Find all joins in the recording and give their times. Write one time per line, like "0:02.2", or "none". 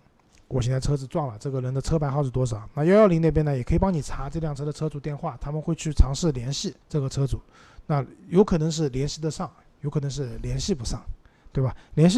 0:06.8